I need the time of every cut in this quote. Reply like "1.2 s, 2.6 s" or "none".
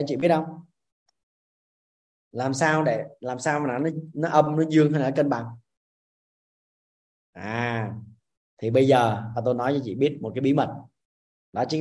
none